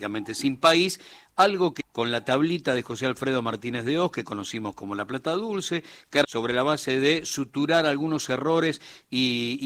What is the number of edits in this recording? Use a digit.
2